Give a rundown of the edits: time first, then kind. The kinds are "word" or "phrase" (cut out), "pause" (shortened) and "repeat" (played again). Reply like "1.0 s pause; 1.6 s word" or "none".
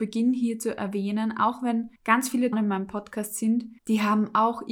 2.0 s pause; 2.5 s phrase; 3.8 s pause